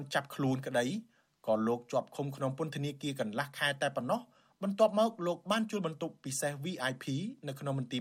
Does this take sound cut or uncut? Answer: uncut